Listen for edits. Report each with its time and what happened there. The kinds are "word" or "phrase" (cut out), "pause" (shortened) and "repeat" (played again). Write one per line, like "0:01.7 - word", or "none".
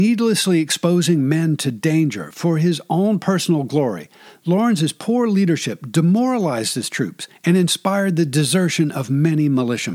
none